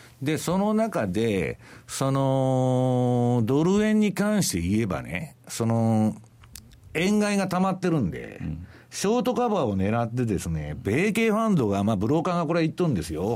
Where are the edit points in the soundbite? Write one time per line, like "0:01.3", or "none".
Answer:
none